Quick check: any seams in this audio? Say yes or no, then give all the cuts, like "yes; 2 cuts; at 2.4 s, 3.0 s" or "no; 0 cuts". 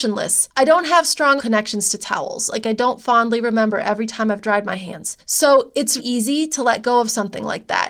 yes; 2 cuts; at 1.4 s, 6.0 s